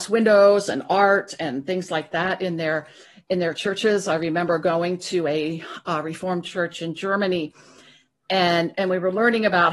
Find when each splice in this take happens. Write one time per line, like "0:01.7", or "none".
none